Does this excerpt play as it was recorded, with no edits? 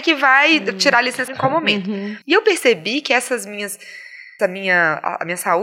no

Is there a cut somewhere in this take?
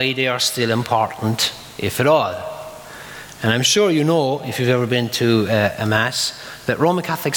no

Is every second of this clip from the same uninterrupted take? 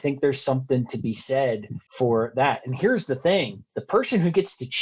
no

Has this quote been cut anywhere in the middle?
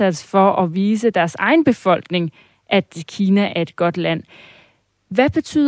no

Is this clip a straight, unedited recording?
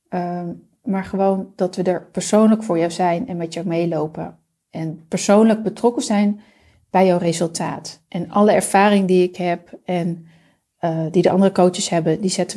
yes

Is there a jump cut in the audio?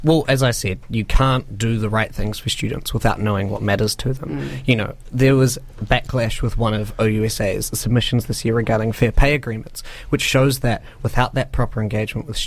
no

